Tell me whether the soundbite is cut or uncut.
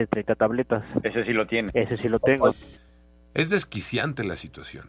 uncut